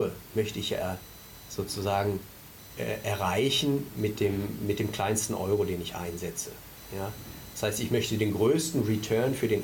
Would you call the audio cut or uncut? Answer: uncut